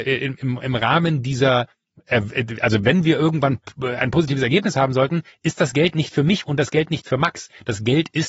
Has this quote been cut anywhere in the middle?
no; 0 cuts

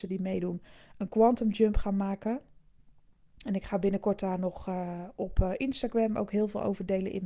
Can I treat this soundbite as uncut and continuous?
yes; 0 cuts

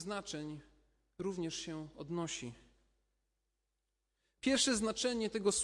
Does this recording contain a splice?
no; 0 cuts

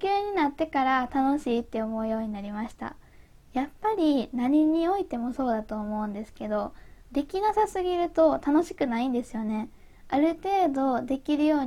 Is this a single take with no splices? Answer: yes; 0 cuts

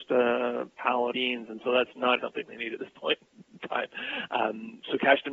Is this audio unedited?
no; 3 cuts; at 1.1 s, 2.2 s, 3.4 s

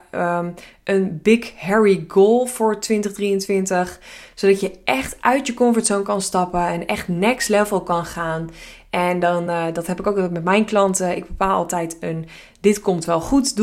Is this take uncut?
yes; 0 cuts

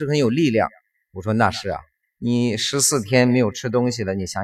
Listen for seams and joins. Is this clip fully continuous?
no; 2 cuts; at 0.9 s, 2.0 s

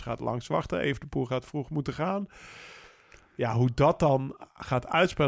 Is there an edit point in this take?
no; 0 cuts

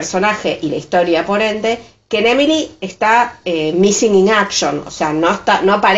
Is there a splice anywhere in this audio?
no; 0 cuts

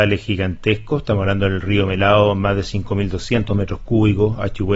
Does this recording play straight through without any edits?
yes; 0 cuts

